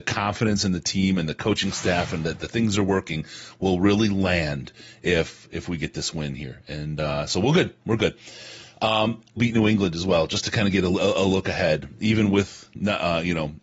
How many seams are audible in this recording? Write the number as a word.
one